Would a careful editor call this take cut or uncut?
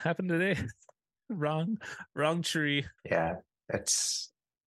cut